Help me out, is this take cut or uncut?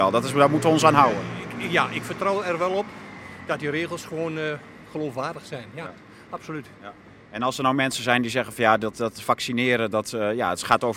uncut